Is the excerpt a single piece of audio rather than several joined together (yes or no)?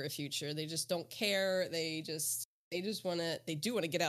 yes